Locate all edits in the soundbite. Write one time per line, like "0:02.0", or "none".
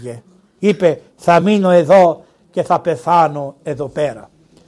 none

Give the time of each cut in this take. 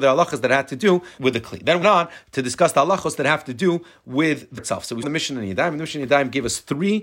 0:01.2
0:01.8
0:04.6
0:05.0

